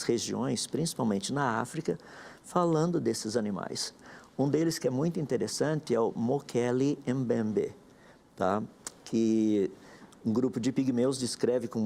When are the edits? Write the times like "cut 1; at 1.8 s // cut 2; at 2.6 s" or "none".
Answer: none